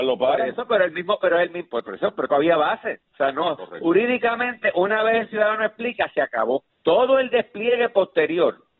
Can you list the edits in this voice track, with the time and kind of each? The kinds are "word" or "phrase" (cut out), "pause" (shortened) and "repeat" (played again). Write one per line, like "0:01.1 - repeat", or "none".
0:02.3 - word
0:03.1 - pause
0:06.7 - pause